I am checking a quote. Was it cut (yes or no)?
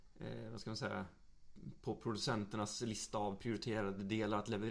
no